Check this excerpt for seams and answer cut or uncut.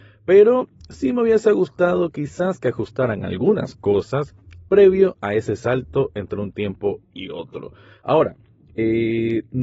uncut